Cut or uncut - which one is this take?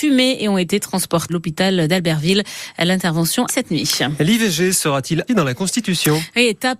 cut